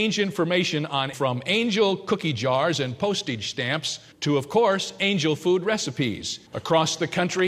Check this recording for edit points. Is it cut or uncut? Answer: cut